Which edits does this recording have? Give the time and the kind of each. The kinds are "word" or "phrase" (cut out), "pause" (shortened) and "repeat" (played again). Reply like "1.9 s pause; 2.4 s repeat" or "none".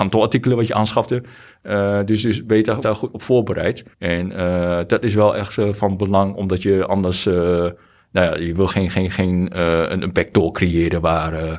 2.8 s word; 3.9 s pause; 8.7 s word